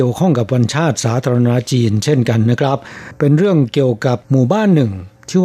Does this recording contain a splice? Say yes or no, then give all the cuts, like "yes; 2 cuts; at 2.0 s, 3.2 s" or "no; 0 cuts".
yes; 1 cut; at 4.2 s